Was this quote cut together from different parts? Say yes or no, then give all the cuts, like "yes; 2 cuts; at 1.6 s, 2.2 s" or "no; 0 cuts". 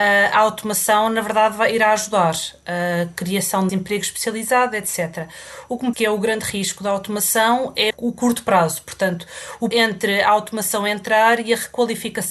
yes; 4 cuts; at 3.7 s, 5.9 s, 7.9 s, 9.7 s